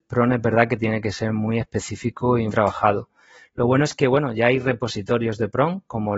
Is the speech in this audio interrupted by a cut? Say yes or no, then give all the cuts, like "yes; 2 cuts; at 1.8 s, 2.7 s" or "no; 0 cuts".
yes; 1 cut; at 2.5 s